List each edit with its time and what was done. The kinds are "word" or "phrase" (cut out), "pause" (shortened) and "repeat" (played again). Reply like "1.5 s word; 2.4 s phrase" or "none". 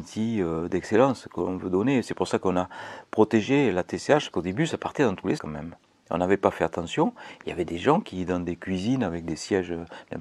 4.3 s word; 5.4 s word